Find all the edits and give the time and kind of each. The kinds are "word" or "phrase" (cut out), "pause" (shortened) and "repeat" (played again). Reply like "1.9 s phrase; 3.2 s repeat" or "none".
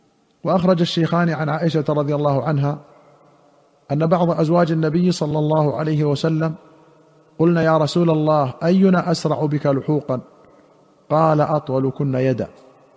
none